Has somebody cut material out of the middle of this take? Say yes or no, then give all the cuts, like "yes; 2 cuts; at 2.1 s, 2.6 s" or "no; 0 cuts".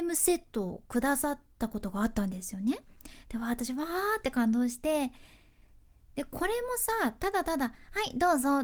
no; 0 cuts